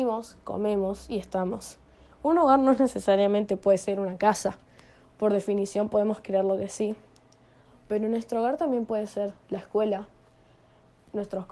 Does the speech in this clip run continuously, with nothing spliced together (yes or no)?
yes